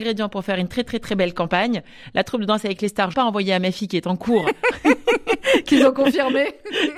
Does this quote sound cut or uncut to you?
cut